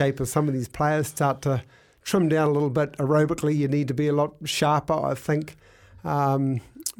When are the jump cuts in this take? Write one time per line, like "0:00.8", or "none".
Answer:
none